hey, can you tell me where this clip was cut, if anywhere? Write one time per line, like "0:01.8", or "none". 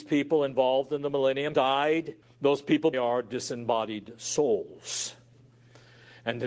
0:01.5
0:02.2
0:02.9